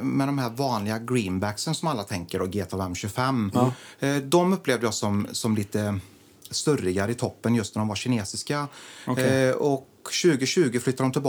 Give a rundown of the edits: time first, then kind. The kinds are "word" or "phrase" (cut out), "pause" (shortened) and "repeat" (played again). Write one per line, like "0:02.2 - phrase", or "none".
none